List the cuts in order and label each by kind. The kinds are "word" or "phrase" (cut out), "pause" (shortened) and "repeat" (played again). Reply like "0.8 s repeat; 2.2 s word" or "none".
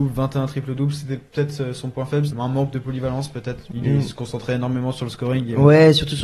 2.3 s word